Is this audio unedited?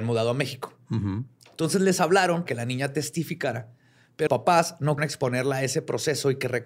no; 3 cuts; at 2.5 s, 4.3 s, 5.0 s

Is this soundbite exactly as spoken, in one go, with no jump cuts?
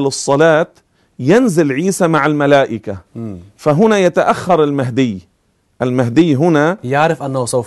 yes; 0 cuts

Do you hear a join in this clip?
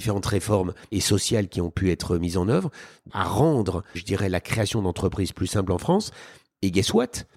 yes; 3 cuts; at 0.9 s, 3.1 s, 3.9 s

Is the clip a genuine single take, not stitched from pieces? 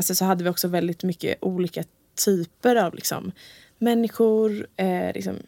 yes; 0 cuts

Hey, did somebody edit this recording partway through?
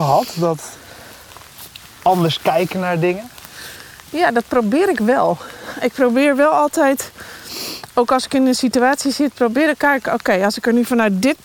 yes; 1 cut; at 9.8 s

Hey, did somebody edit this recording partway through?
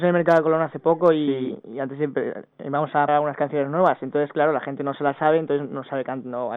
yes; 2 cuts; at 2.5 s, 3.1 s

